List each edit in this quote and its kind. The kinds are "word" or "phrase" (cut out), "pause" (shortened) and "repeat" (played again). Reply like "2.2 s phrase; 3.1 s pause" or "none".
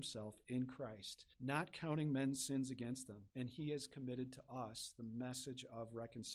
1.3 s pause; 3.3 s pause